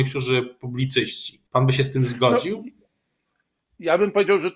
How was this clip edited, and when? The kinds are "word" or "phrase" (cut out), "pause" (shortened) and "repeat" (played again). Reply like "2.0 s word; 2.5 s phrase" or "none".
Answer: 1.5 s pause